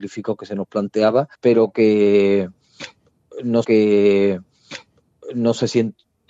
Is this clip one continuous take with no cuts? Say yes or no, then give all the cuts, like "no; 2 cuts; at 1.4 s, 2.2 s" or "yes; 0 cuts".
no; 2 cuts; at 1.3 s, 3.6 s